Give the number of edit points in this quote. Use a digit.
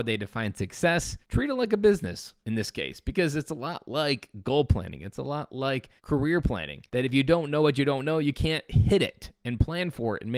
4